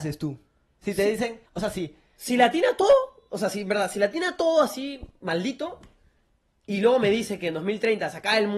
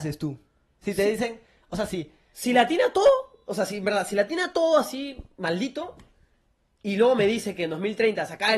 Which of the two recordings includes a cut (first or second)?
first